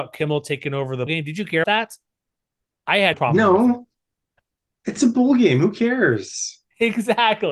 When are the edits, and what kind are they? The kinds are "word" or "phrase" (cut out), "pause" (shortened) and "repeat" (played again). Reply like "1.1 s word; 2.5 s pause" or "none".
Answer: 1.1 s word; 1.6 s word; 3.1 s word; 5.0 s word